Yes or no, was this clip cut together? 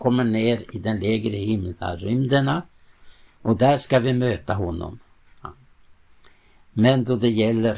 no